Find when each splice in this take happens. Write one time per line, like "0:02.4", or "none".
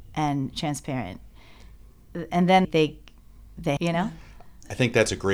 0:02.3
0:02.6
0:03.8